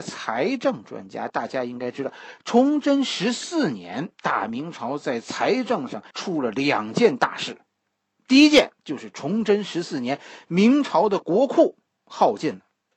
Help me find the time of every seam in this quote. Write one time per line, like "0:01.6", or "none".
0:04.1
0:06.1
0:08.8

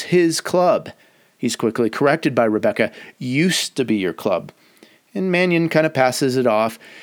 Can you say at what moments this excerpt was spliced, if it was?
none

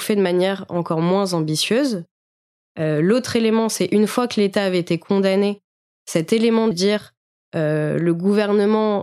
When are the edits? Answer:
0:06.7

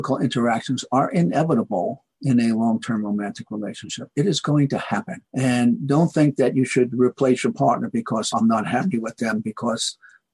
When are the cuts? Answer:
0:02.1
0:05.3
0:08.3

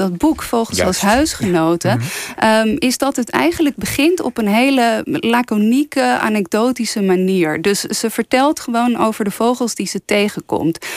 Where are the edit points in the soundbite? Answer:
none

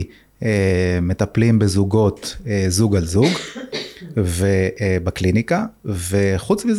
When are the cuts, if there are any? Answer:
none

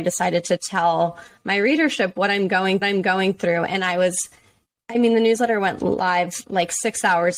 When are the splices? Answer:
0:02.8

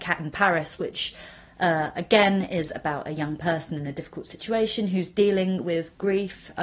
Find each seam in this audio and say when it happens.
none

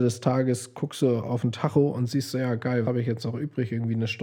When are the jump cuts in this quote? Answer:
0:02.8

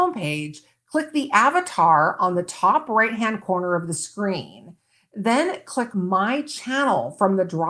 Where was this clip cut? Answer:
0:05.9

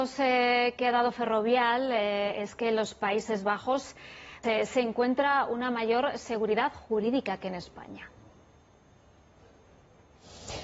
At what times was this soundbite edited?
0:04.4

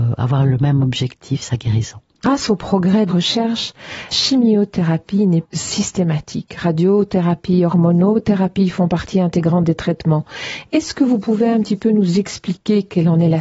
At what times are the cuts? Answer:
0:03.1
0:04.1
0:05.4

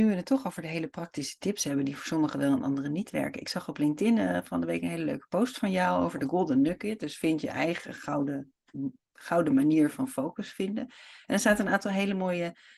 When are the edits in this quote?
none

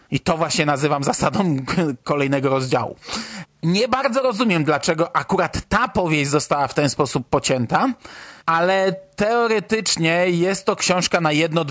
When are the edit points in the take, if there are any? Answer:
0:08.4

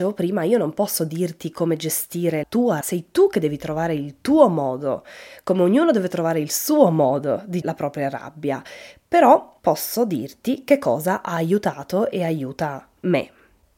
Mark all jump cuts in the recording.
0:02.4
0:02.8
0:07.6
0:09.6

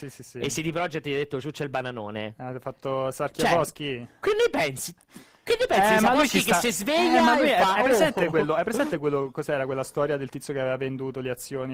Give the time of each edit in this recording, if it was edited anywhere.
none

